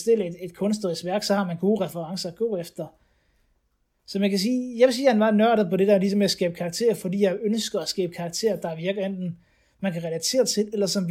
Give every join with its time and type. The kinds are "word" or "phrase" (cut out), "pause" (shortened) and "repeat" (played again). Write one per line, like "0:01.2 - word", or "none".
none